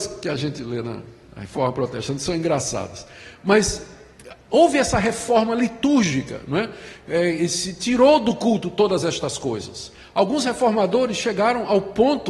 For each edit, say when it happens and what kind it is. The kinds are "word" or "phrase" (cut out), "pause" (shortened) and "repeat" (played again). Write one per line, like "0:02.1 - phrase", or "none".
none